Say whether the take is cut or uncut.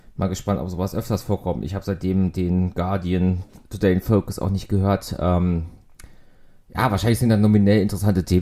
uncut